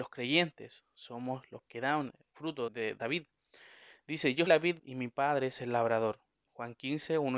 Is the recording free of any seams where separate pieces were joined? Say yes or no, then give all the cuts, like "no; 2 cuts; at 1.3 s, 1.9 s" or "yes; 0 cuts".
no; 6 cuts; at 1.6 s, 2.3 s, 2.7 s, 3.0 s, 4.5 s, 4.8 s